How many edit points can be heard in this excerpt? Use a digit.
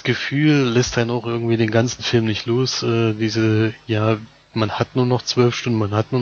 0